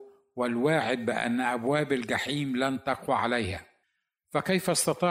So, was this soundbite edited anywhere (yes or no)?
no